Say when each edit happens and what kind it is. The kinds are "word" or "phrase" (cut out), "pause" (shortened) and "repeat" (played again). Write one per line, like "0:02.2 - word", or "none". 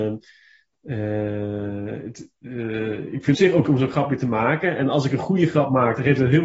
0:03.3 - phrase
0:03.6 - word